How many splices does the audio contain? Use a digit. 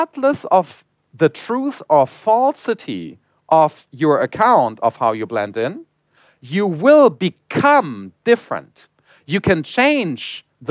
0